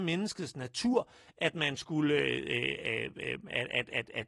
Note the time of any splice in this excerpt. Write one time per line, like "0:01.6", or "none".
none